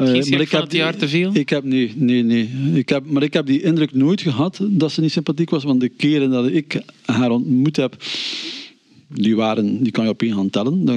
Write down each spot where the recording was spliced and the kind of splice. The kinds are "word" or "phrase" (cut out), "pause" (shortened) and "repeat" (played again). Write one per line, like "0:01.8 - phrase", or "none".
none